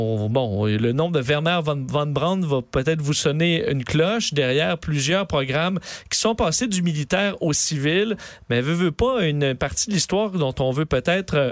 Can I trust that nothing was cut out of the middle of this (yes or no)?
yes